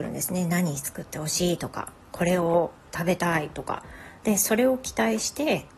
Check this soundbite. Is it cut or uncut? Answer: cut